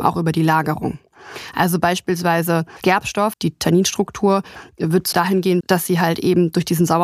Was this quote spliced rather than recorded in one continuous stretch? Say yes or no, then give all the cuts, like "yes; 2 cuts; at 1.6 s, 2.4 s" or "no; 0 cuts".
yes; 4 cuts; at 2.8 s, 3.3 s, 5.1 s, 5.6 s